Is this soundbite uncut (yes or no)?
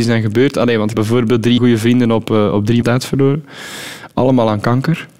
no